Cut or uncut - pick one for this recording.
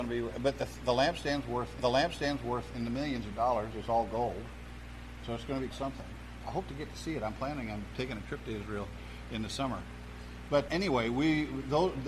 cut